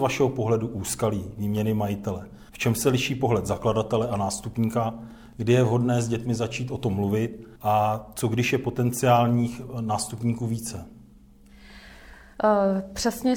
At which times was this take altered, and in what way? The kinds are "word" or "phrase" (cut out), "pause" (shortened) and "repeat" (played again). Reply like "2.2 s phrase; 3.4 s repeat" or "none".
2.5 s pause; 7.6 s pause